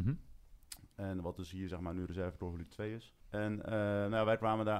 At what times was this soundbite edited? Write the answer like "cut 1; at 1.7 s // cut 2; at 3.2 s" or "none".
cut 1; at 3.2 s